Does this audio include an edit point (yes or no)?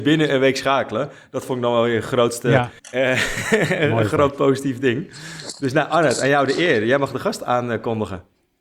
yes